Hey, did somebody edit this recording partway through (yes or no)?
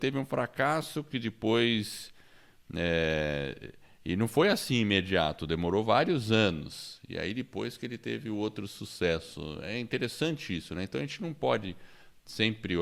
no